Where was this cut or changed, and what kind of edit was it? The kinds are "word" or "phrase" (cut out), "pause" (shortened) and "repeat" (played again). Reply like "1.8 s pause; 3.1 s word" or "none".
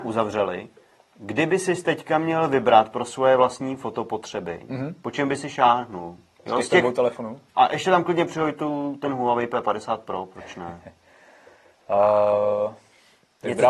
7.5 s pause